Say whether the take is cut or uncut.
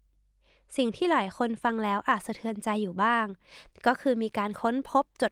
uncut